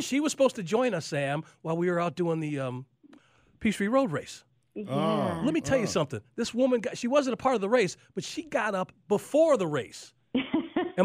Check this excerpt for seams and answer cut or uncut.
uncut